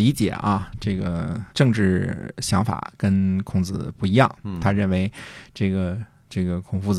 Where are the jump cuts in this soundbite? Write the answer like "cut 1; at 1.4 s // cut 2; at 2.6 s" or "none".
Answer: cut 1; at 1.5 s